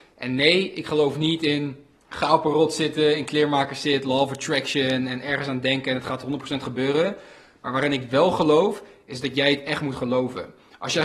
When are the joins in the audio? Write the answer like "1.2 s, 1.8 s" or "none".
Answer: 2.0 s

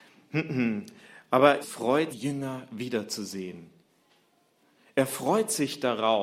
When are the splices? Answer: 1.6 s, 2.1 s

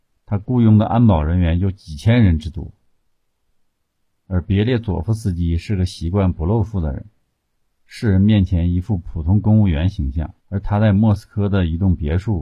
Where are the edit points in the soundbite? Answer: 10.4 s

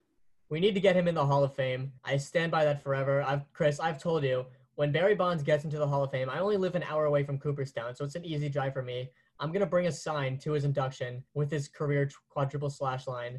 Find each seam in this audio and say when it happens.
2.0 s, 11.3 s

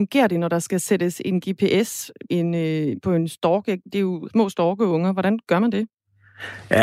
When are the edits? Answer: 2.3 s, 4.3 s

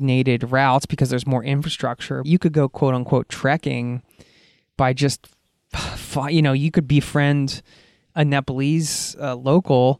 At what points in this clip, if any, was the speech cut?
2.2 s

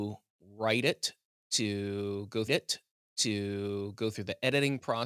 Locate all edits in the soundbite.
2.5 s

